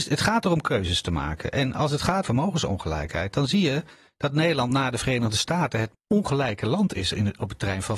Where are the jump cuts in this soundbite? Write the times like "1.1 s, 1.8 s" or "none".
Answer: 2.2 s, 5.9 s